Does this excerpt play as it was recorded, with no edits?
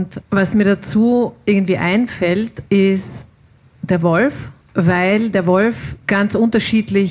no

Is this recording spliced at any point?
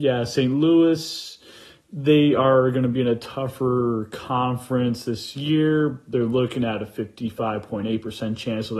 no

